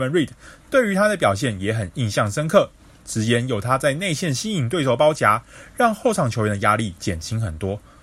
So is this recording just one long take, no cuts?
yes; 0 cuts

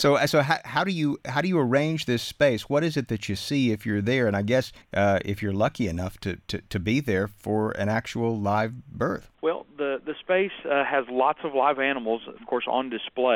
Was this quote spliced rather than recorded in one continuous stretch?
yes; 2 cuts; at 4.8 s, 9.3 s

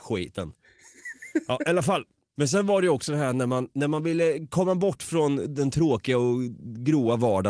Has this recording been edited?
no; 0 cuts

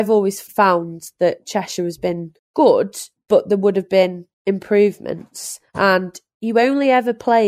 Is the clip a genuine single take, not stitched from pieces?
no; 2 cuts; at 2.4 s, 4.3 s

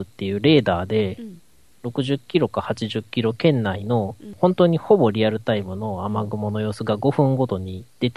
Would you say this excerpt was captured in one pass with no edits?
yes; 0 cuts

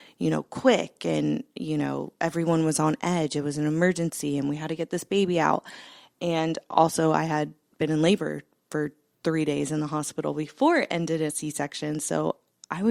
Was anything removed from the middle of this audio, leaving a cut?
yes; 1 cut; at 11.3 s

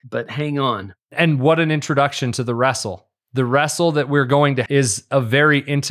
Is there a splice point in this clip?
yes; 2 cuts; at 1.0 s, 4.7 s

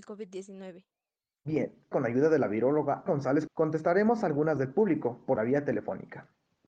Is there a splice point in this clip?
yes; 5 cuts; at 1.9 s, 3.1 s, 3.5 s, 4.6 s, 5.4 s

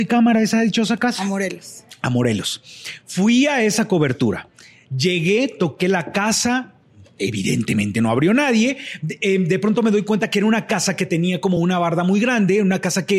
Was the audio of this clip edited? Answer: no; 0 cuts

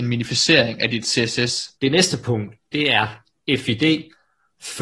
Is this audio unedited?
no; 1 cut; at 1.7 s

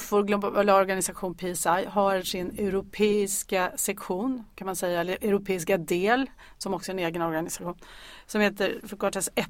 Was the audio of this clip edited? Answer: no; 0 cuts

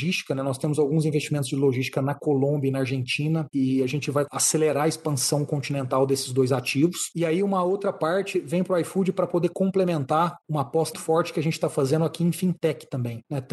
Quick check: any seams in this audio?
yes; 1 cut; at 10.9 s

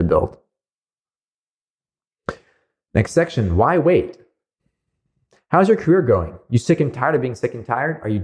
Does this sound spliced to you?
no; 0 cuts

